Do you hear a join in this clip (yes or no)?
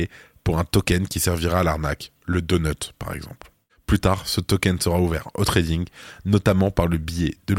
no